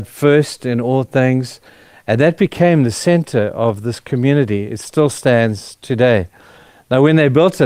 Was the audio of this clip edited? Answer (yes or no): no